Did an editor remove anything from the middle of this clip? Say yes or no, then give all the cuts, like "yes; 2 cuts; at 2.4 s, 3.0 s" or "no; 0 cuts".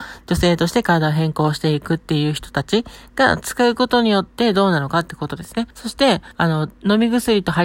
yes; 2 cuts; at 5.7 s, 6.3 s